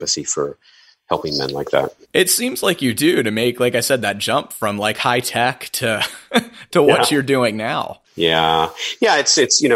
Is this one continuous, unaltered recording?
no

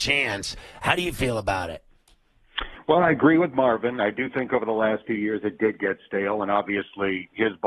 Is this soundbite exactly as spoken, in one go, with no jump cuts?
yes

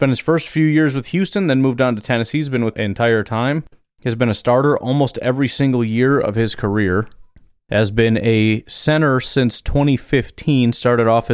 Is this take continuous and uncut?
no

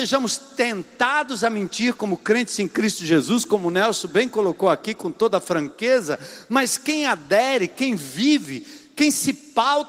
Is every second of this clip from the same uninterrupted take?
yes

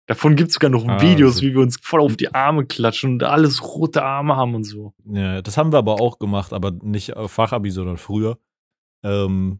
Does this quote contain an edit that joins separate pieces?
yes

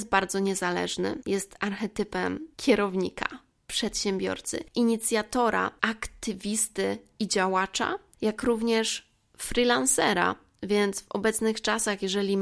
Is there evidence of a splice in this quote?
no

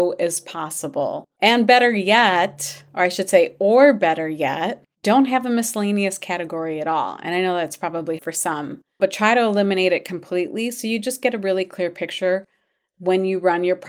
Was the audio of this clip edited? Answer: yes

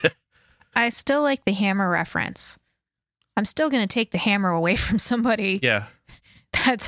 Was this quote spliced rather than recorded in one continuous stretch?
no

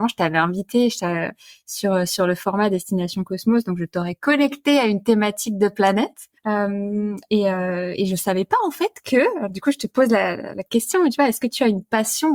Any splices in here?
yes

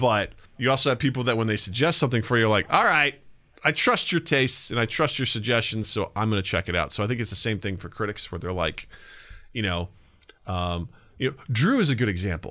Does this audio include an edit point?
no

